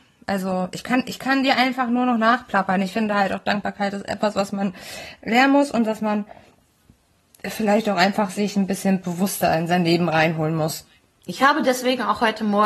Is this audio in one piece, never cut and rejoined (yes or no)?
yes